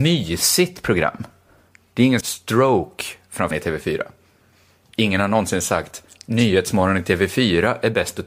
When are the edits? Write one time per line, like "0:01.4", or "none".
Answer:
0:02.2
0:03.5